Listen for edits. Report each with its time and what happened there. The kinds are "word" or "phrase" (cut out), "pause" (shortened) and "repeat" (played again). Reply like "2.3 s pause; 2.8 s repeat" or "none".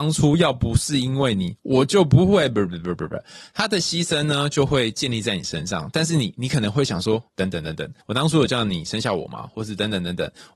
7.3 s pause; 8.0 s pause